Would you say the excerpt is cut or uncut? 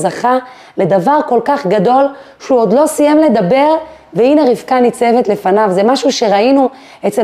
uncut